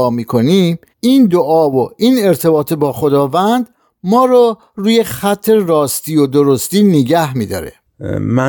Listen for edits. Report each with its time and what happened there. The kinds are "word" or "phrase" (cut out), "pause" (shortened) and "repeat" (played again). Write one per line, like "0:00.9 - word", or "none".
0:00.9 - pause